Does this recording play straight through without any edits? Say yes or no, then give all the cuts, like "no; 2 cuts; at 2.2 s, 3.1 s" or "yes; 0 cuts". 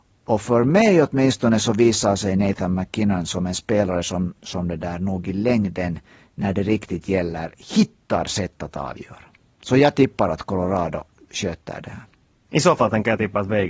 yes; 0 cuts